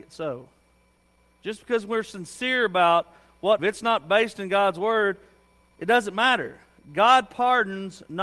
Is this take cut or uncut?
cut